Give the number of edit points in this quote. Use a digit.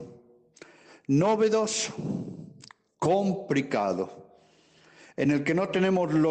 0